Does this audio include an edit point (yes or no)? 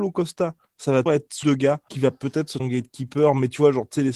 yes